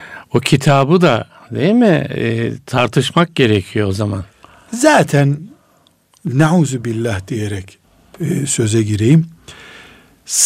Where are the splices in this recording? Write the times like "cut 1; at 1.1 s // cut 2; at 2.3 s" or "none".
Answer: none